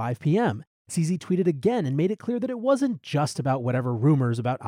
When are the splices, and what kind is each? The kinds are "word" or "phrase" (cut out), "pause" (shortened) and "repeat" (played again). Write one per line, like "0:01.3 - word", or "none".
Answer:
none